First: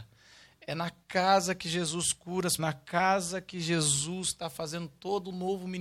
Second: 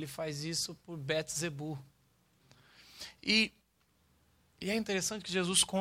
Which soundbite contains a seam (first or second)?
first